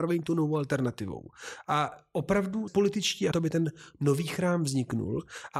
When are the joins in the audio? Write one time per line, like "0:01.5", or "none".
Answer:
0:02.7
0:03.3